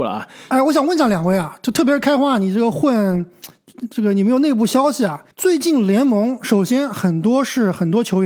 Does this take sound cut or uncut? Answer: cut